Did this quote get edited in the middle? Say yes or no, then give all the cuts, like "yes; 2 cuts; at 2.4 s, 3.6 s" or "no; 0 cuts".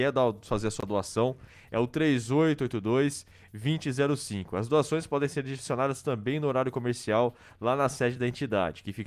no; 0 cuts